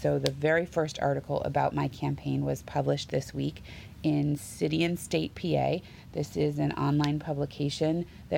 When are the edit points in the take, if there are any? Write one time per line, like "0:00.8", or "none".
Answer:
none

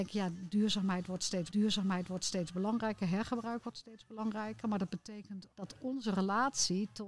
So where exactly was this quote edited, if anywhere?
0:01.5
0:05.5

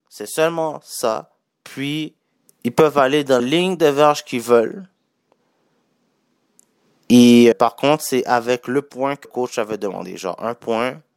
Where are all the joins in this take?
0:03.4
0:07.5
0:09.2

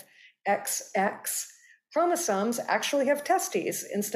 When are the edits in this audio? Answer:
none

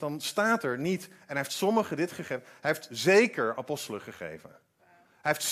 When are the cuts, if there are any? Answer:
none

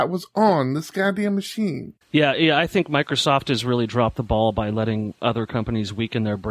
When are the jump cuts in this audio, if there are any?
0:02.0

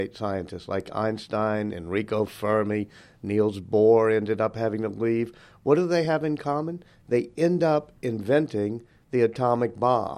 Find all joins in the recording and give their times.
none

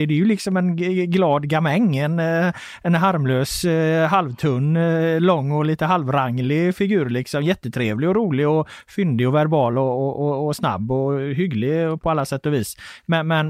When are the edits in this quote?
none

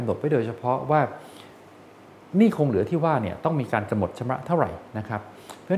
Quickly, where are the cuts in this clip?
none

